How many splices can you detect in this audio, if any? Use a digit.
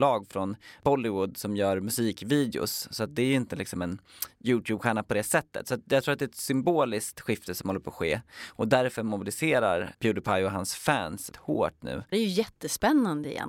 4